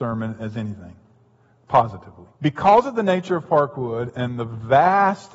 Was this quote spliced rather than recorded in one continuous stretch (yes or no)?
yes